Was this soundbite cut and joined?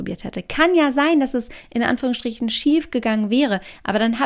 no; 0 cuts

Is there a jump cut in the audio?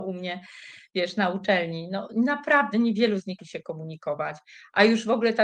yes; 1 cut; at 3.4 s

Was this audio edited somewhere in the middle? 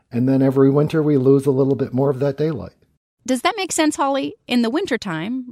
no; 0 cuts

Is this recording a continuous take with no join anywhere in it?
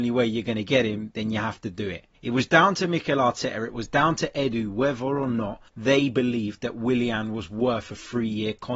no; 2 cuts; at 2.1 s, 5.7 s

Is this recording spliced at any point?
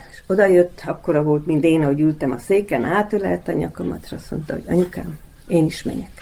no; 0 cuts

